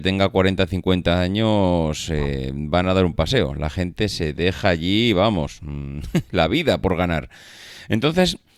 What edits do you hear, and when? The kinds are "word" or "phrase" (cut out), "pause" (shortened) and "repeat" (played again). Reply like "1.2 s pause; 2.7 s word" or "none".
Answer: none